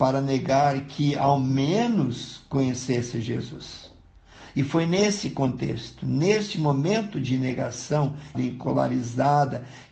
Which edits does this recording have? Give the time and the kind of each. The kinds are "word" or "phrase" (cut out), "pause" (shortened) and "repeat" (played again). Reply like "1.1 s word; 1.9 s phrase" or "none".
8.3 s word